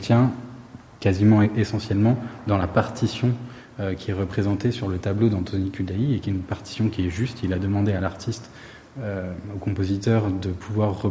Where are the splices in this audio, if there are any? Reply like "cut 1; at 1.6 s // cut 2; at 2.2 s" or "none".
none